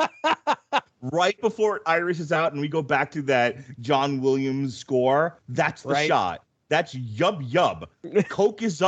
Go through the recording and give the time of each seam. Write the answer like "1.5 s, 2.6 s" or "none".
none